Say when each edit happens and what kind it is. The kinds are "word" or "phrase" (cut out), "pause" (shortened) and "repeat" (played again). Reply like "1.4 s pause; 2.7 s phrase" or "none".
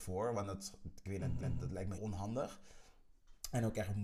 1.4 s repeat; 2.0 s word